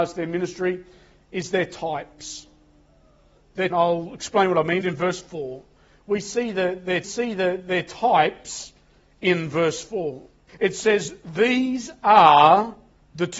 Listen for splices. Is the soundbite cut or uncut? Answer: cut